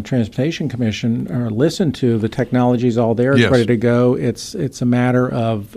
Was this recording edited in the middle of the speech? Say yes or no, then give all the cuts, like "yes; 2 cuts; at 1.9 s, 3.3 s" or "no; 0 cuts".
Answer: no; 0 cuts